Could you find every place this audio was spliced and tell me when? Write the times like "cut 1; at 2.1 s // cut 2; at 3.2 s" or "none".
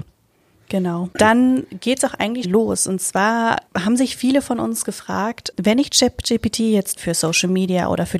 cut 1; at 2.4 s // cut 2; at 3.7 s // cut 3; at 7.0 s